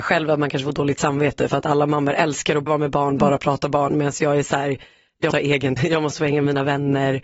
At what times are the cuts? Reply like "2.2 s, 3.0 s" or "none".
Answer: 2.7 s, 5.3 s, 5.8 s

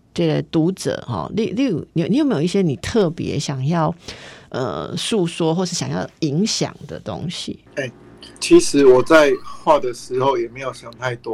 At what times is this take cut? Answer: 7.7 s, 8.3 s

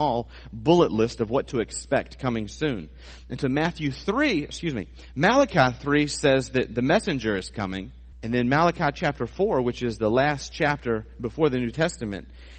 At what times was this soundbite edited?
8.1 s

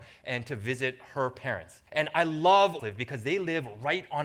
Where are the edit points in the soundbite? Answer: 1.9 s, 2.8 s

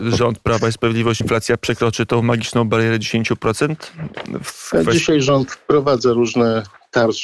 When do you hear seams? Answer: 1.2 s

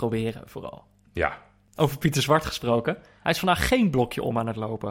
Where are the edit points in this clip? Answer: none

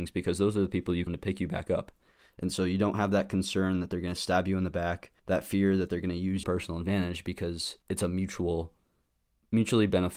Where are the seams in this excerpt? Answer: 1.1 s, 5.2 s, 6.4 s, 7.8 s

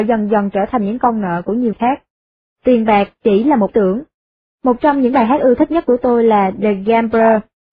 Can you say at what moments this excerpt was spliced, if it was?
1.7 s, 3.7 s

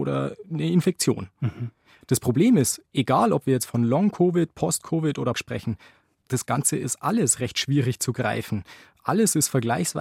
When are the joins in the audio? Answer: 5.3 s

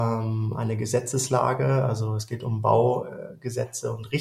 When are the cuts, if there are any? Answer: none

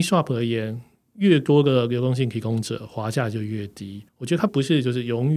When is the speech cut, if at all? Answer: 4.1 s

